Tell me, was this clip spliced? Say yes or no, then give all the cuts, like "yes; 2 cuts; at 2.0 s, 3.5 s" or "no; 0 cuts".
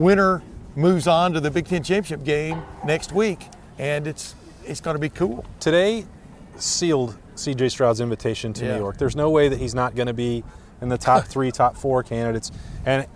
no; 0 cuts